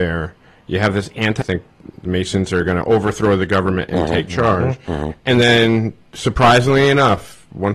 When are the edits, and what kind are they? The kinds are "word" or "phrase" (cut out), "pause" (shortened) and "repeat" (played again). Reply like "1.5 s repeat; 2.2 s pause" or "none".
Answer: 1.4 s phrase